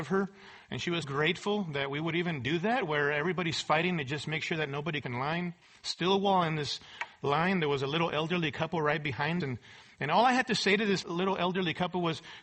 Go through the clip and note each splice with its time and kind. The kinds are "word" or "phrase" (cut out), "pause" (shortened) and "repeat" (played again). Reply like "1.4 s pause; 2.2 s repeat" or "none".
1.0 s word; 5.0 s phrase; 5.6 s pause; 9.4 s word; 11.0 s word